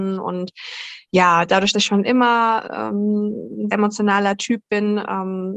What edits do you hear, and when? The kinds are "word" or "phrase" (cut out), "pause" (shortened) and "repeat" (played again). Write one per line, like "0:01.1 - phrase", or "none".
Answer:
0:01.7 - word
0:03.7 - word